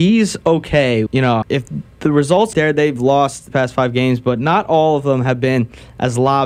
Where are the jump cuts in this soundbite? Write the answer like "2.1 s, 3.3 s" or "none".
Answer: 1.1 s, 1.4 s, 2.5 s, 3.5 s